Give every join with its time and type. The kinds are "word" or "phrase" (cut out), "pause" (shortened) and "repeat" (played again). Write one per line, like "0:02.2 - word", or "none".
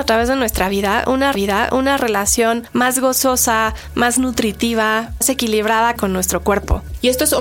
0:01.3 - repeat
0:05.2 - word
0:06.0 - phrase